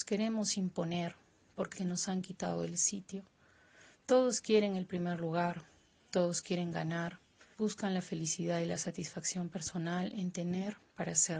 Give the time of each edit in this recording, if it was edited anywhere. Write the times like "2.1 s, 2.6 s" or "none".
1.7 s, 7.5 s